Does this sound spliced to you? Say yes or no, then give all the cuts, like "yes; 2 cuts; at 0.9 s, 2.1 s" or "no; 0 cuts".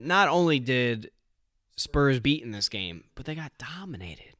yes; 1 cut; at 2.2 s